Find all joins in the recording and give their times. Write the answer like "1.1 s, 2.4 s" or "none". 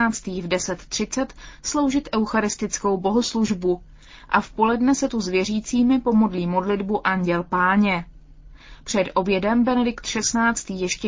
none